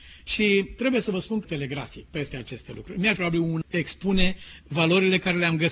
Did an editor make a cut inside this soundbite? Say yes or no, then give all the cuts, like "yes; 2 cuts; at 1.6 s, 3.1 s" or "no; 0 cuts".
yes; 4 cuts; at 1.4 s, 2.3 s, 3.2 s, 3.6 s